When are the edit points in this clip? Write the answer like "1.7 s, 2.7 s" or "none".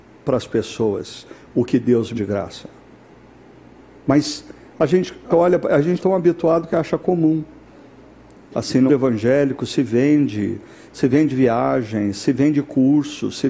2.1 s, 5.3 s, 6.0 s, 6.7 s, 8.9 s